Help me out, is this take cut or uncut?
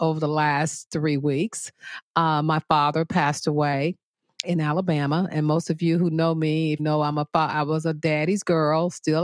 cut